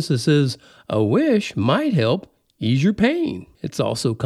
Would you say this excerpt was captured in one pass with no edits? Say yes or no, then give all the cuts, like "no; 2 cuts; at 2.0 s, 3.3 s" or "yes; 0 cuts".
yes; 0 cuts